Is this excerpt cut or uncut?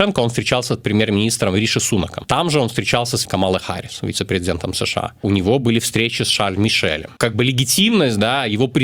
uncut